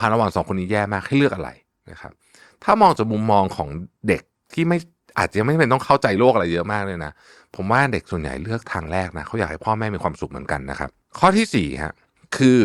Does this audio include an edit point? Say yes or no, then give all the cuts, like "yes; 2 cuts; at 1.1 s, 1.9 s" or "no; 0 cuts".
no; 0 cuts